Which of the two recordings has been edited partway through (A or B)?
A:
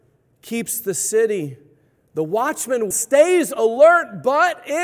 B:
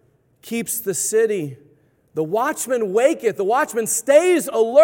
A